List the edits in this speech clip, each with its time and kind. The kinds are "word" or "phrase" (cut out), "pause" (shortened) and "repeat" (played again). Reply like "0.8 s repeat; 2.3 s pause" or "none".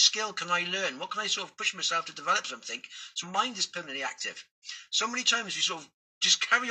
3.2 s word